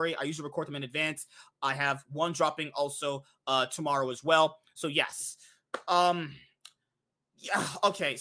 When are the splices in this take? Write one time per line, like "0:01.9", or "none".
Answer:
none